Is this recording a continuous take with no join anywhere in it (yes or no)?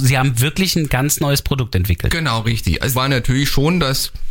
no